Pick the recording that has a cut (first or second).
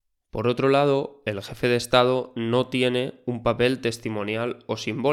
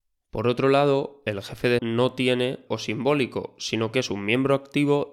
second